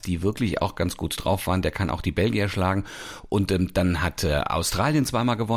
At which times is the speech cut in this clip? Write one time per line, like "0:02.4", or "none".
none